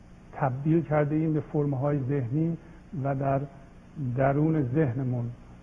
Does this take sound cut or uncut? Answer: uncut